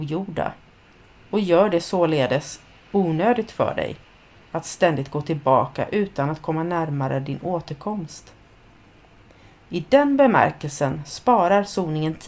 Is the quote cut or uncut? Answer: uncut